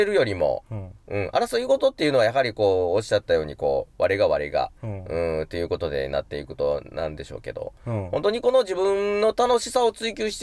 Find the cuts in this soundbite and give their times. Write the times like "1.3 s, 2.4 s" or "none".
4.8 s